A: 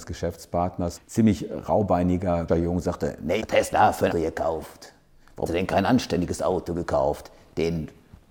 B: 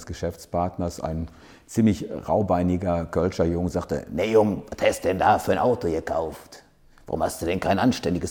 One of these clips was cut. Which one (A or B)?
A